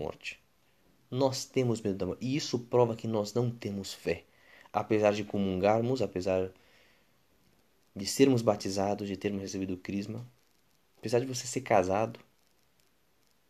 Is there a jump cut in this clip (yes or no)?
no